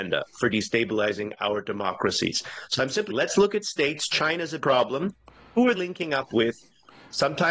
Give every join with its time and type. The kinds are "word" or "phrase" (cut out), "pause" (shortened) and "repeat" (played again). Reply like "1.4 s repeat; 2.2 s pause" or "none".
3.1 s word; 4.6 s word; 5.7 s word